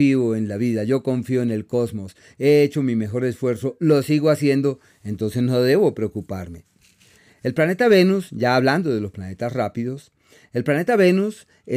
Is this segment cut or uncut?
uncut